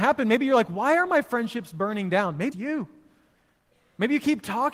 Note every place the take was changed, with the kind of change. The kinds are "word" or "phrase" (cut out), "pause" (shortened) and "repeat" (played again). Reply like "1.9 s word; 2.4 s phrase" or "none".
2.5 s word